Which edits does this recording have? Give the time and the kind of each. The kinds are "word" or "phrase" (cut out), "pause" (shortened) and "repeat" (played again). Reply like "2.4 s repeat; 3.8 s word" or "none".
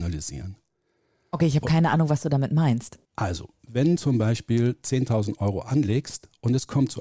3.0 s pause; 4.0 s word